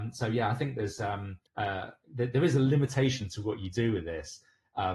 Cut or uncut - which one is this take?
cut